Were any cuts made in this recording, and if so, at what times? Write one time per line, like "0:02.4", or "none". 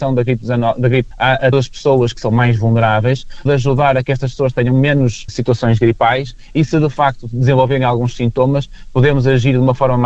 0:01.1
0:01.5
0:03.5
0:05.3